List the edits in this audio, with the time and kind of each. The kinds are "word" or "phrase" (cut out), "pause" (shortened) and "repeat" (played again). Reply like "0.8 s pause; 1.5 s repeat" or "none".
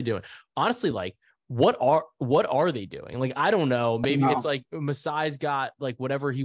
none

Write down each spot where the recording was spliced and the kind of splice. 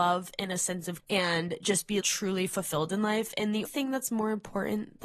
1.0 s word; 2.0 s word; 3.6 s word

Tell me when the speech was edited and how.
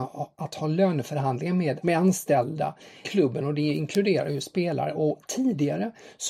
1.8 s word; 3.0 s word

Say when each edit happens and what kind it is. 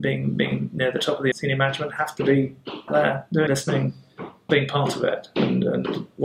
1.3 s word; 2.9 s word; 3.5 s word; 4.5 s word

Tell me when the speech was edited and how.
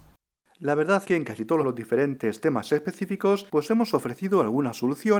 1.0 s word; 1.6 s phrase; 3.5 s pause

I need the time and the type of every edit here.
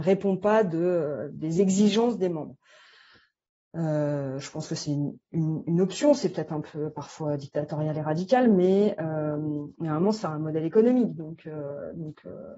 none

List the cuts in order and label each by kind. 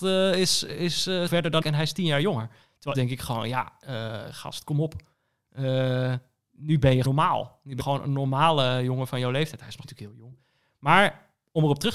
1.3 s word; 1.6 s word; 2.9 s word; 7.0 s word; 7.8 s word; 9.8 s word

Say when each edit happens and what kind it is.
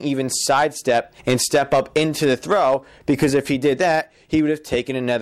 1.2 s pause

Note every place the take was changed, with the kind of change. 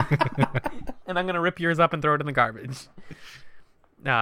none

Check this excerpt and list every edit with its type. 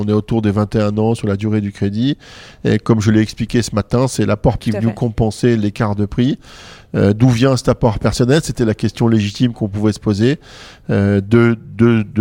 4.6 s word

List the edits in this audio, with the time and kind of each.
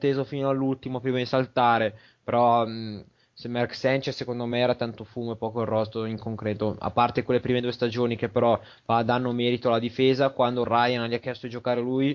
none

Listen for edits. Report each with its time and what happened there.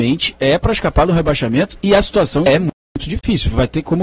2.5 s word

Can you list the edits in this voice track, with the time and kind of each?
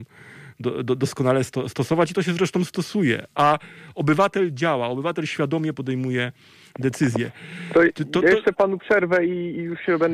none

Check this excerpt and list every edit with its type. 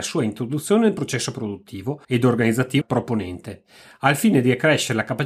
2.0 s pause; 2.8 s word

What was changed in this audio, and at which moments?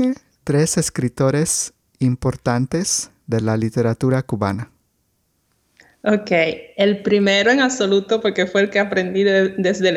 none

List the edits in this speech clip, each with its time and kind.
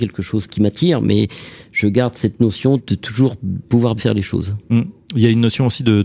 2.8 s word; 4.0 s word

